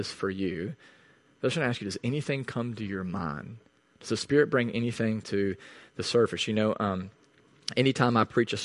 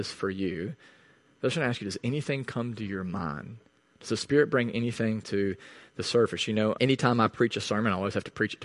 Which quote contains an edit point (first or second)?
second